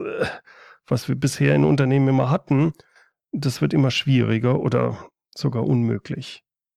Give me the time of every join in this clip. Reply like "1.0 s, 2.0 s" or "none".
none

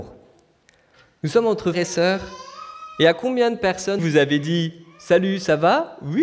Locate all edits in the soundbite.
0.9 s, 1.7 s, 4.0 s

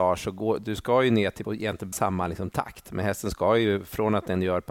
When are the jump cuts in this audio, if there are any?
1.4 s, 1.9 s

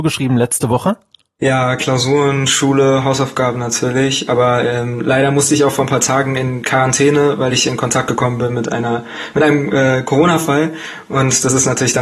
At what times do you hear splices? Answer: none

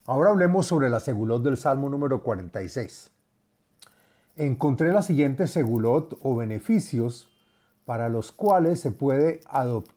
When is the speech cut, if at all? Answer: none

